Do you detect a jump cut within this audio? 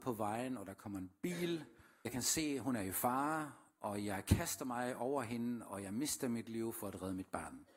yes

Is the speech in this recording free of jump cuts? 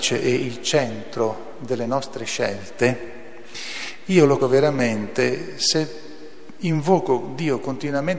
no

